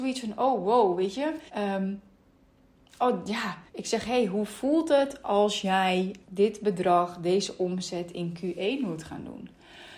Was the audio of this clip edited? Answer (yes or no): yes